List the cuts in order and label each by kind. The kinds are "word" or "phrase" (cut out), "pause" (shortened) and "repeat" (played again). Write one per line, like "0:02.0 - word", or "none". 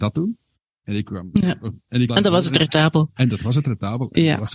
0:02.1 - word